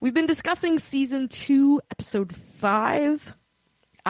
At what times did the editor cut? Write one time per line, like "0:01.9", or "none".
none